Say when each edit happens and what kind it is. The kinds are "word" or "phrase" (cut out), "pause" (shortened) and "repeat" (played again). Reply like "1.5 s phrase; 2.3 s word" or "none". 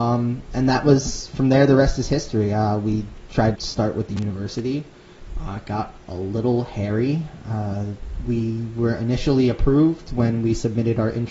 3.6 s word